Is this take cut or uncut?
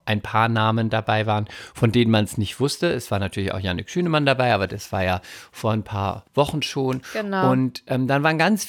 cut